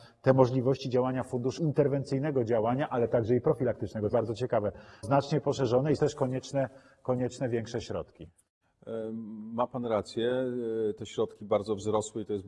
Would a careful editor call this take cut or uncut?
cut